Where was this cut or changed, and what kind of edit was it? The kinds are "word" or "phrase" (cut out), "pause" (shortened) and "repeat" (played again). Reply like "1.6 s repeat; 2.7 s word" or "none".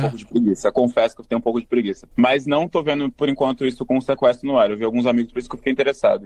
2.1 s pause; 5.3 s word